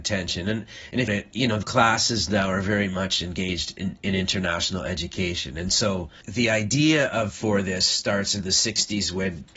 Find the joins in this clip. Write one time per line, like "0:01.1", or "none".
0:01.1
0:01.6